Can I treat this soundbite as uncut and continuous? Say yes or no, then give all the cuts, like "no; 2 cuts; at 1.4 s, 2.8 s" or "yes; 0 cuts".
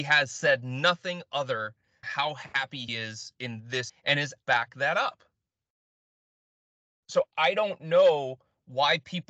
no; 4 cuts; at 2.0 s, 2.9 s, 3.9 s, 4.4 s